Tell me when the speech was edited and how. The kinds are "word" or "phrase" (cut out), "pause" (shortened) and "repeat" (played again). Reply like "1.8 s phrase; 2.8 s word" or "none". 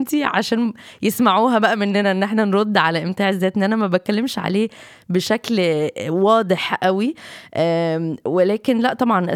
none